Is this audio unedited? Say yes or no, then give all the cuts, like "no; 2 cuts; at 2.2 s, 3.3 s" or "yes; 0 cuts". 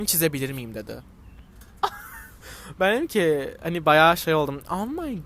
yes; 0 cuts